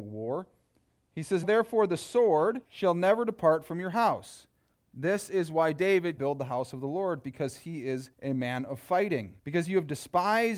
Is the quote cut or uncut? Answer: cut